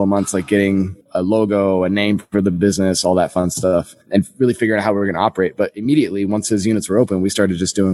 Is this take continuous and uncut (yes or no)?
no